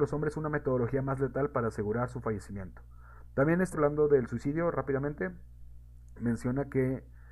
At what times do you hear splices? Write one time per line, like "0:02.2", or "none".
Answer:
0:03.7